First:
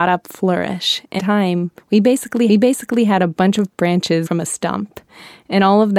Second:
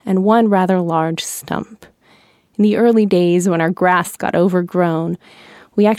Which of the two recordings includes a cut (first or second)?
first